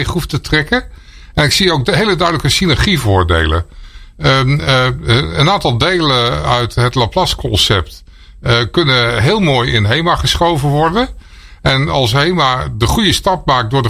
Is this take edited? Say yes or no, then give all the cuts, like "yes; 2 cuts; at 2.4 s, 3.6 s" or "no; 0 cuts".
no; 0 cuts